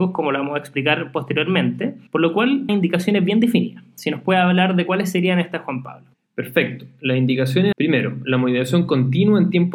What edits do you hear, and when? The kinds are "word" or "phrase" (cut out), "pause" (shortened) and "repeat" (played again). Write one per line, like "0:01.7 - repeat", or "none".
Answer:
0:02.1 - pause
0:02.7 - phrase
0:06.1 - pause
0:07.7 - phrase